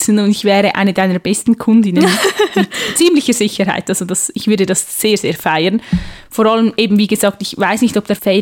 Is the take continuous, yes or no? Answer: yes